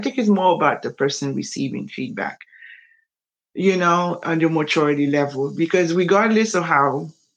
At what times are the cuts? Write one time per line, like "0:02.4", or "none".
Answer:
none